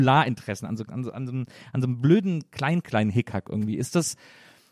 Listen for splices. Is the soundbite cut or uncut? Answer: uncut